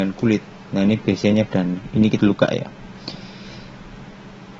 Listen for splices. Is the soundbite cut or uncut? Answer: cut